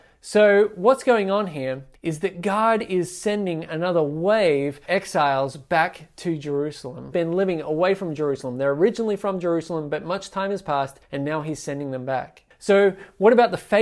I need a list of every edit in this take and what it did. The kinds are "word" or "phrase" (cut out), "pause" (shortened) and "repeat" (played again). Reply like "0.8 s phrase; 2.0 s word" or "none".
1.9 s pause; 4.9 s word; 7.1 s phrase; 11.0 s pause; 12.5 s pause